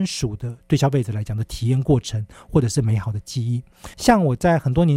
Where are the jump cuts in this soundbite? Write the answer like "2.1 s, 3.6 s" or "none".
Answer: 3.9 s